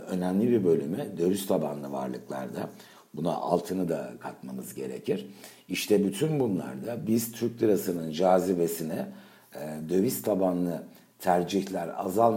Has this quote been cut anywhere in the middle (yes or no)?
no